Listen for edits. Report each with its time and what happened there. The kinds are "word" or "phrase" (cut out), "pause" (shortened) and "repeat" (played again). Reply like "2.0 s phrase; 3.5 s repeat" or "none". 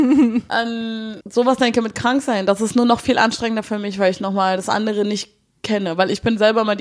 1.2 s word